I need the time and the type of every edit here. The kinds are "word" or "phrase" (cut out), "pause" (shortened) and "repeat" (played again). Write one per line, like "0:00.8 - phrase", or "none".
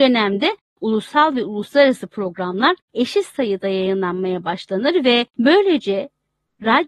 0:02.8 - pause
0:05.3 - pause